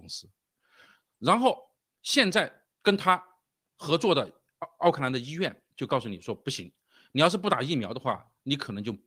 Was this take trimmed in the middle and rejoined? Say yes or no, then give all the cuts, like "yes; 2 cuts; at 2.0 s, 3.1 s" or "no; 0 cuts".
yes; 2 cuts; at 2.7 s, 5.7 s